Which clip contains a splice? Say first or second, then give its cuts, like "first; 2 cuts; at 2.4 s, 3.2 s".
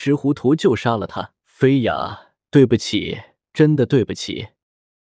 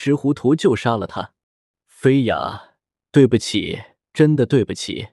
first; 2 cuts; at 1.4 s, 2.4 s